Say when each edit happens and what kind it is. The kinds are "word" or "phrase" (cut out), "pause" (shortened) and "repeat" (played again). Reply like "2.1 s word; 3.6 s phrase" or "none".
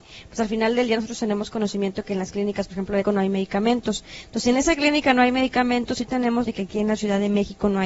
3.0 s word; 6.5 s word